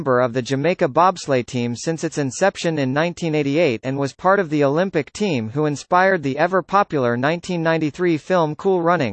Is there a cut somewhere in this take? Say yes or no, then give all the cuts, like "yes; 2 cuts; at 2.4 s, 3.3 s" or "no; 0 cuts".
no; 0 cuts